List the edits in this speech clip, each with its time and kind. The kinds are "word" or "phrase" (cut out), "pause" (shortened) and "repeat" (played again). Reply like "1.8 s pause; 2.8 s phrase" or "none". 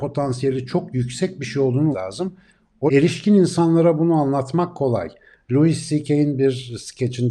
1.9 s word; 2.9 s word